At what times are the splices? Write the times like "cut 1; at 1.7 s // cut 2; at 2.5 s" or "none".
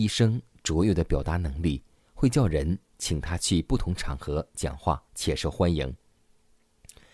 cut 1; at 5.1 s